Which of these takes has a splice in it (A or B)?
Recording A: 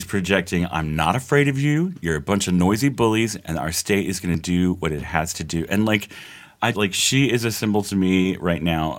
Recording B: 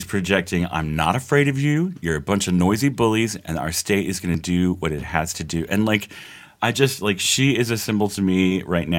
A